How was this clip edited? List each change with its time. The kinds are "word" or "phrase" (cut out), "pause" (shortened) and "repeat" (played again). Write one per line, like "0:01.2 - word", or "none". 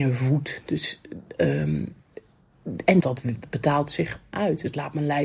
0:03.0 - word
0:04.3 - word